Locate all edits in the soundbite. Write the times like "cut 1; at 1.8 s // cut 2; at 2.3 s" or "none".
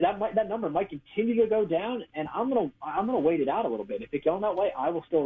cut 1; at 4.2 s